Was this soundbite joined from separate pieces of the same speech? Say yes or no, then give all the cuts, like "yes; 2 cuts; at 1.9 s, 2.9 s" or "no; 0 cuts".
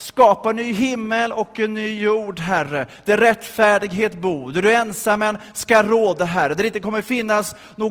no; 0 cuts